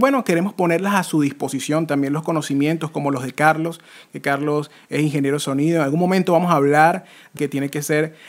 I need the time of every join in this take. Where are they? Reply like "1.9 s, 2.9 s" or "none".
7.4 s